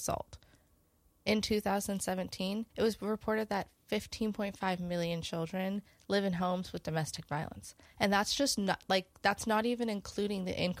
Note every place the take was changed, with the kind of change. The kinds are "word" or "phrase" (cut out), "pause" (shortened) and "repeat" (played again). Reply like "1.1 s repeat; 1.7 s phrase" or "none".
2.7 s pause